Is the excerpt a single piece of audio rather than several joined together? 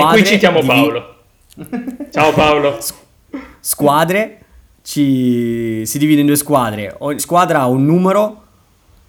no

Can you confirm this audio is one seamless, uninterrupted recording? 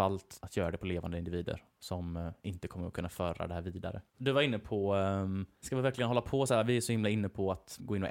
no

